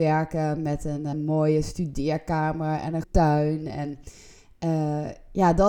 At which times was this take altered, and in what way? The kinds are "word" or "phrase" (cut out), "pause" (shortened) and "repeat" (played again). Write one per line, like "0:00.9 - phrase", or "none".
0:01.1 - word
0:03.0 - word